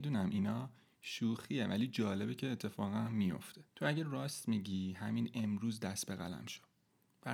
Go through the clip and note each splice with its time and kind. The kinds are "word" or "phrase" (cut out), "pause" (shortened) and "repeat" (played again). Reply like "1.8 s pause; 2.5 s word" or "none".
3.7 s pause